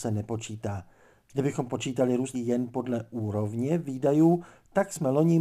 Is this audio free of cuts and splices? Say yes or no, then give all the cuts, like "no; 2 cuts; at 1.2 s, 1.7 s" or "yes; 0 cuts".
no; 1 cut; at 2.3 s